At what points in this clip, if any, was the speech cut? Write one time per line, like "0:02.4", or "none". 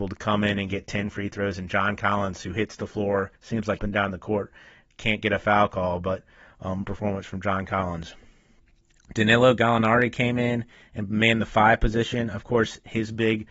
0:03.4
0:03.8
0:06.8